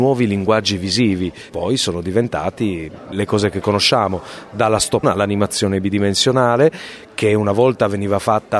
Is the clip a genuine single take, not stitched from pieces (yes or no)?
no